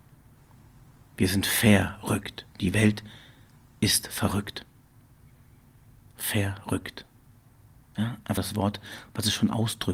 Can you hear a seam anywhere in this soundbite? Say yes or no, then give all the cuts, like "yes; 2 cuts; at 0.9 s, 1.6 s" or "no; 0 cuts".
yes; 1 cut; at 8.4 s